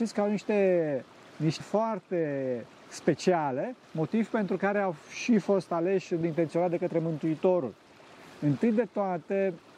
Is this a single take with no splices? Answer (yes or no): no